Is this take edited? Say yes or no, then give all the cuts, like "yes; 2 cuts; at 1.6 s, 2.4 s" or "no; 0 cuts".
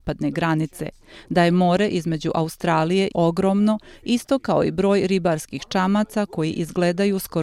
yes; 1 cut; at 3.1 s